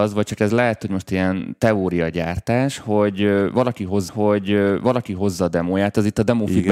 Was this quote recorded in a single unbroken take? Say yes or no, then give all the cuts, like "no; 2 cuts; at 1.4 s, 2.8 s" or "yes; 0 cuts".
no; 1 cut; at 4.1 s